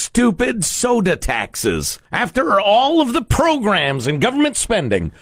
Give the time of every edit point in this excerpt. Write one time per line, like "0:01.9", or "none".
0:02.1

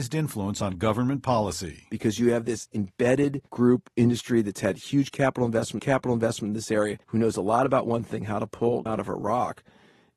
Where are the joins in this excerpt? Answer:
0:03.5
0:05.8
0:07.0
0:08.9

